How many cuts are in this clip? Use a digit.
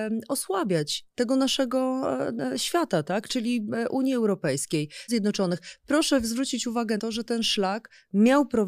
2